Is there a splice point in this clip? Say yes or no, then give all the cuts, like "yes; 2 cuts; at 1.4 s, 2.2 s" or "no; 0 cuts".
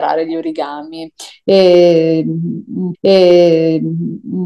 yes; 1 cut; at 2.9 s